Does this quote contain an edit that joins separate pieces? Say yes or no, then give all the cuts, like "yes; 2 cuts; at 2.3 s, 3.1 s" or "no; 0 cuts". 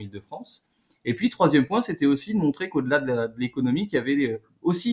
no; 0 cuts